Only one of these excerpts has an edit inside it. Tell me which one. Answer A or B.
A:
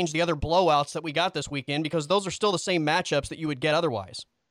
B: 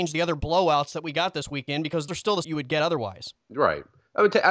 B